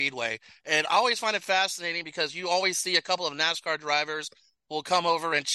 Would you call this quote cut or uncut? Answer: uncut